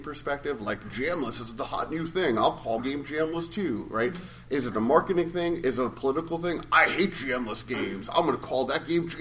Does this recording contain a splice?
yes; 1 cut; at 2.8 s

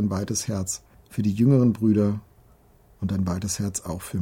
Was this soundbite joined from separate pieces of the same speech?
yes; 1 cut; at 0.9 s

